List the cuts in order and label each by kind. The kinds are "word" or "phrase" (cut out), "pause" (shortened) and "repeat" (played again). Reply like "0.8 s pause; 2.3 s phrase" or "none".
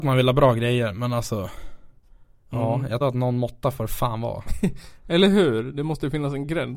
2.0 s pause; 3.0 s phrase